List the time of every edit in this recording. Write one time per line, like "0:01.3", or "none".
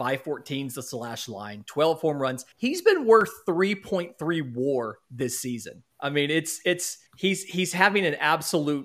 0:02.5
0:05.9
0:07.1